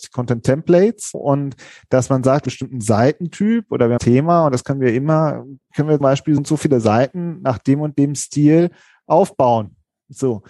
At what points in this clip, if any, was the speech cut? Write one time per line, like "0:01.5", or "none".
0:01.1
0:02.5
0:04.0
0:06.0
0:06.4